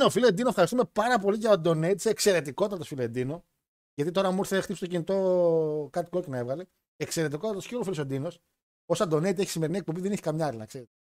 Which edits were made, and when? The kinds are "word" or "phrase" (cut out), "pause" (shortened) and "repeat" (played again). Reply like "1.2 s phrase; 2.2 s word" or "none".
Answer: none